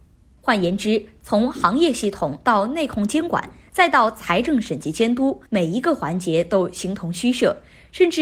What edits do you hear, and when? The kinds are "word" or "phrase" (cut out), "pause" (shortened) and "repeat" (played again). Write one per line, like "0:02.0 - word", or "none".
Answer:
0:05.5 - pause